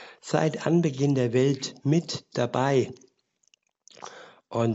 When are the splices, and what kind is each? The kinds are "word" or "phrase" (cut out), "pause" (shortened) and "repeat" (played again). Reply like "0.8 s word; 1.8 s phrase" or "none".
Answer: none